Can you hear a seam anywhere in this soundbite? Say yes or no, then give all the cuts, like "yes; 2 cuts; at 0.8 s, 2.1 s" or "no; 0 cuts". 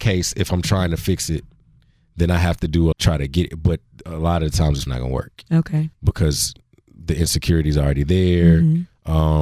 yes; 3 cuts; at 2.9 s, 4.9 s, 5.9 s